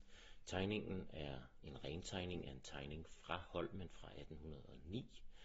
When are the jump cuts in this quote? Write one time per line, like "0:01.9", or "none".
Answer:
none